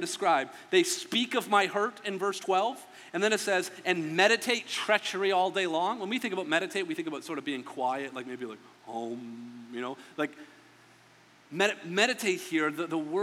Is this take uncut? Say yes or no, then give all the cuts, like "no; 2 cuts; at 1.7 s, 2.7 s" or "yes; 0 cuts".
yes; 0 cuts